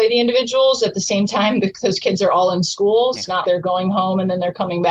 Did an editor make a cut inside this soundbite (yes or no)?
yes